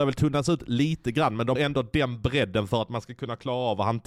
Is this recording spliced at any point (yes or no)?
yes